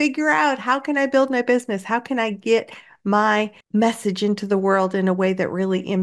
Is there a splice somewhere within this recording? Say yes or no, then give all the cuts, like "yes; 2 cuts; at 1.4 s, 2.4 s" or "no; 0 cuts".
no; 0 cuts